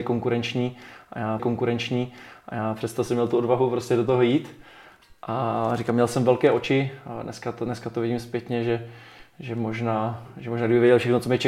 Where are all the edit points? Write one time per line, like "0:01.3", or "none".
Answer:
0:01.4